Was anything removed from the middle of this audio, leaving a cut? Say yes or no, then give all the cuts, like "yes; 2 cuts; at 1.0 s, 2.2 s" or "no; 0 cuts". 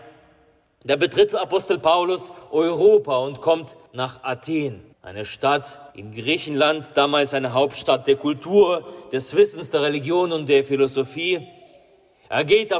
yes; 3 cuts; at 3.9 s, 4.9 s, 5.9 s